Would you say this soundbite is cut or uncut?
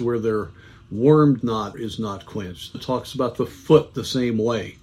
cut